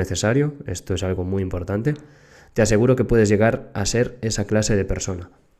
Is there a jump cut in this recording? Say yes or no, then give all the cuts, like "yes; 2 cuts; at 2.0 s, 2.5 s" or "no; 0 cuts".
no; 0 cuts